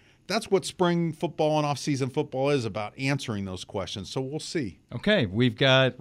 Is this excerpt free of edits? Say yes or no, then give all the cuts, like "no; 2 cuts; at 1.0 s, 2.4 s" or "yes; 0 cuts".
no; 1 cut; at 4.8 s